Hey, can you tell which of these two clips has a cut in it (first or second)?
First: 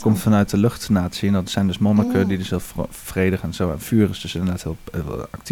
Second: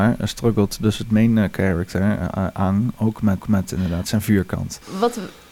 second